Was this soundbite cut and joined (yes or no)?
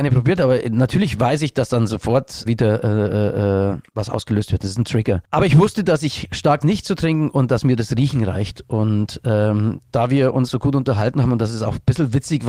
yes